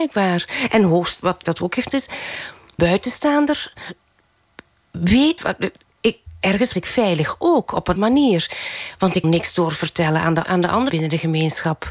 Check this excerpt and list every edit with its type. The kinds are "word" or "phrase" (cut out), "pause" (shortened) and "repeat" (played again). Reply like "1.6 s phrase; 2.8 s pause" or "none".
1.4 s word; 1.9 s word; 2.8 s word; 5.4 s word; 6.7 s word; 8.0 s word; 9.2 s word; 10.4 s word; 10.9 s word